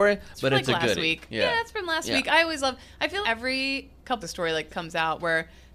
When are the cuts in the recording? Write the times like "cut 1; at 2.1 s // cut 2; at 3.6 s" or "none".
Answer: cut 1; at 3.2 s // cut 2; at 4.2 s // cut 3; at 4.7 s